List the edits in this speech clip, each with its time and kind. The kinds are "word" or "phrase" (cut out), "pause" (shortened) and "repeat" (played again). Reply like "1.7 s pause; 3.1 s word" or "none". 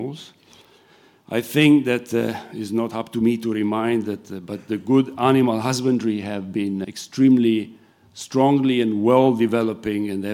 6.8 s word